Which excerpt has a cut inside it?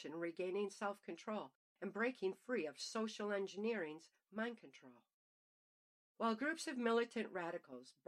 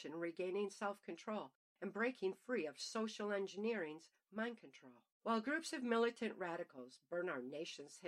second; 1 cut; at 5.1 s

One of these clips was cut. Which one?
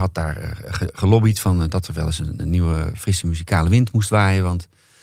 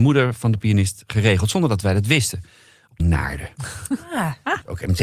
second; 1 cut; at 3.0 s

